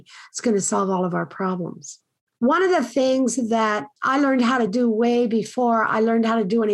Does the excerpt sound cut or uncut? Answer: uncut